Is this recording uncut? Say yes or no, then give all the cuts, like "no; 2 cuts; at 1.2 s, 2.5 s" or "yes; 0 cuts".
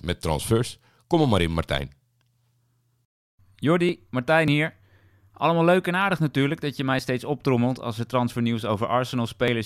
yes; 0 cuts